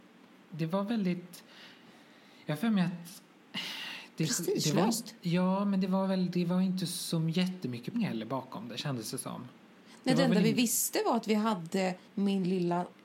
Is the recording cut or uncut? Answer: cut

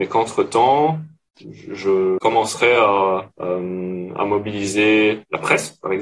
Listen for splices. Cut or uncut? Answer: uncut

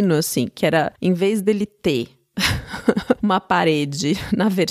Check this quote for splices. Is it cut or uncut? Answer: uncut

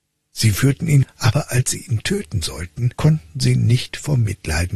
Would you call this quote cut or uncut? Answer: cut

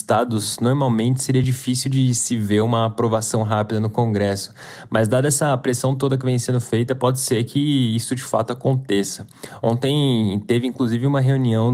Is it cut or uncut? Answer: uncut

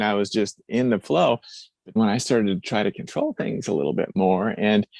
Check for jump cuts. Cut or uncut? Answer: cut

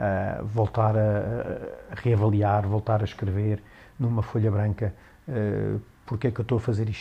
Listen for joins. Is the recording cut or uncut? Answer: uncut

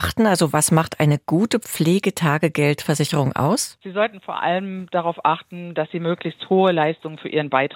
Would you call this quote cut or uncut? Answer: uncut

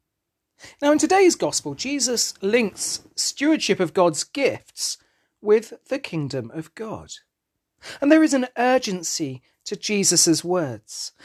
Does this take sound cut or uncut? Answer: uncut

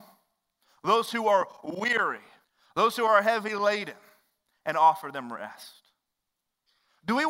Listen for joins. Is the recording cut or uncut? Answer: cut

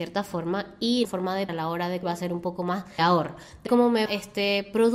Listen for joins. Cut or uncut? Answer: cut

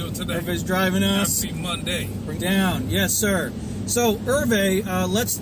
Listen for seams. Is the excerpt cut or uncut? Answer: cut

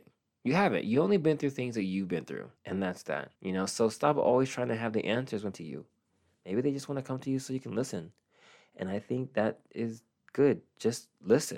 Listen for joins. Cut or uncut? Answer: cut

